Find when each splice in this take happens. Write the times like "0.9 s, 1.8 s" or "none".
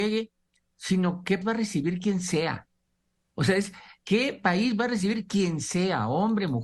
1.4 s